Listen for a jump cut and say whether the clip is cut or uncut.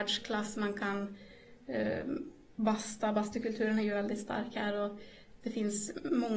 uncut